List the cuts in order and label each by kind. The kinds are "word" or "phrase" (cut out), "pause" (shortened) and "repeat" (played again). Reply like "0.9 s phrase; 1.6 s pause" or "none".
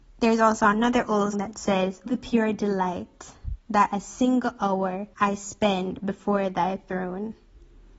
1.3 s word; 2.1 s word; 5.1 s pause

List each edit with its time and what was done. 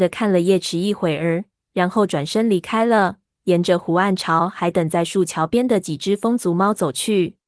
none

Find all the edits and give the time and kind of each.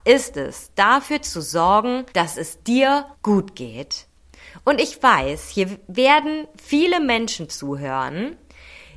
2.1 s pause; 3.1 s pause

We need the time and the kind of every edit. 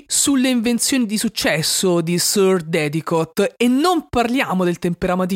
none

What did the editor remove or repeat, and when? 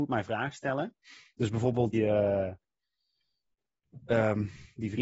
1.9 s word

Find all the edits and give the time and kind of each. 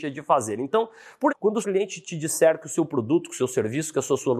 1.3 s word; 1.6 s word

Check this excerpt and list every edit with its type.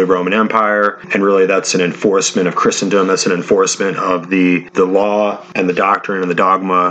none

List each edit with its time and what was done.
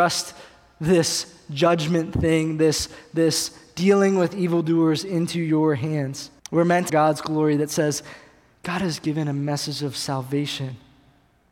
6.4 s pause; 6.9 s phrase

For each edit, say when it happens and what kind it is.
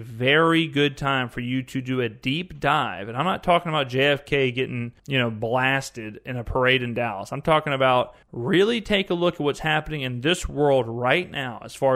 5.0 s pause; 8.2 s pause

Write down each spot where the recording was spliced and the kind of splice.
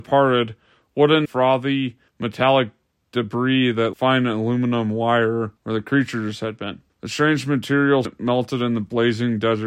1.2 s phrase; 2.1 s pause; 3.9 s phrase; 5.6 s pause; 6.9 s pause; 8.0 s word

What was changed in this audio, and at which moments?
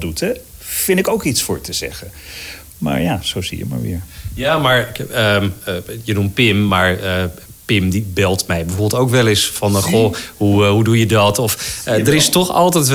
none

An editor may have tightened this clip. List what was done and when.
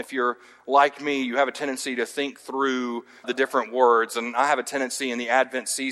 3.2 s word

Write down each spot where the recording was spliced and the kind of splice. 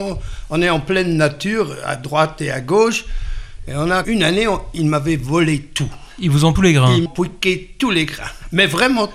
4.0 s phrase; 6.6 s phrase; 7.1 s word

